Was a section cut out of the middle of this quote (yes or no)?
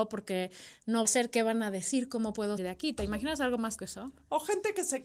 yes